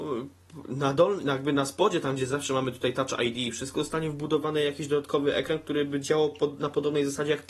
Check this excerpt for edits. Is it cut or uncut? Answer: uncut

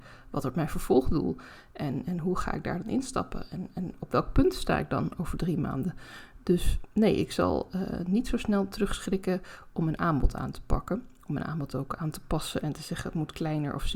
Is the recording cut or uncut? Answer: uncut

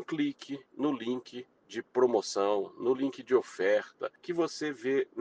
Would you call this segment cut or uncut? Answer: uncut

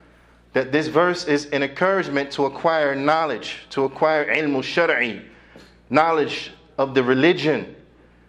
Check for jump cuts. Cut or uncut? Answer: uncut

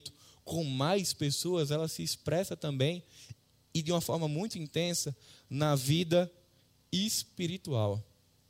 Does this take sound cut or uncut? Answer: uncut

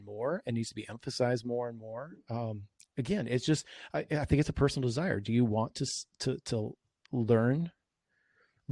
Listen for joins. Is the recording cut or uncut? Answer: uncut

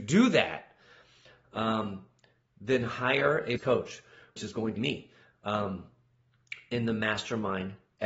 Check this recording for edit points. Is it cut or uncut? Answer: cut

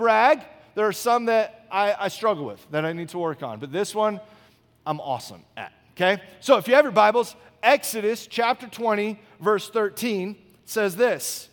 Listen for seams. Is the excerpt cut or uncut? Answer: uncut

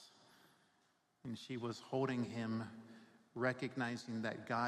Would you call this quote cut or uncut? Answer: uncut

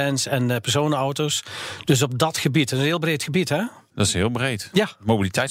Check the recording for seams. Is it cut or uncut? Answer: uncut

